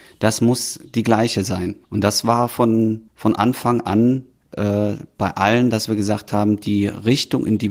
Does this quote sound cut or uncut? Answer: cut